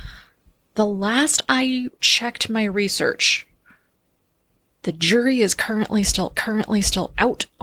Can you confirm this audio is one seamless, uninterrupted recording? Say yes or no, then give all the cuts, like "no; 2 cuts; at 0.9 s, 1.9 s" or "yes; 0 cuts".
no; 2 cuts; at 1.9 s, 6.3 s